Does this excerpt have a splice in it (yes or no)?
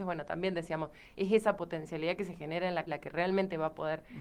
yes